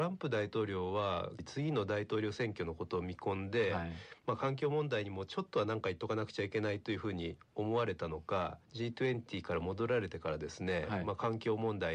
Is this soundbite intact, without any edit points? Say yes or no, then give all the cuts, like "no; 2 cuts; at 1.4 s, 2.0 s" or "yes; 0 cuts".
no; 1 cut; at 8.6 s